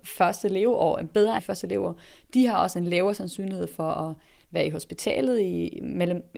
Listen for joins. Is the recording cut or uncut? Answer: cut